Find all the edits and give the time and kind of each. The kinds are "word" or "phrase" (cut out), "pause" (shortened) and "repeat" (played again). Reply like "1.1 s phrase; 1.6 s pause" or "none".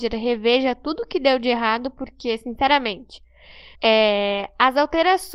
3.7 s pause